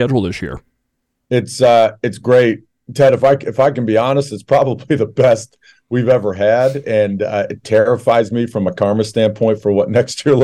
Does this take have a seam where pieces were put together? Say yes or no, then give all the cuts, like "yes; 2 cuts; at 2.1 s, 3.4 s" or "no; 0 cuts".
no; 0 cuts